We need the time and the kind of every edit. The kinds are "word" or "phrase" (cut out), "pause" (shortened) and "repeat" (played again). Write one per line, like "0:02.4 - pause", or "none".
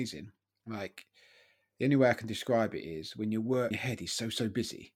0:03.7 - word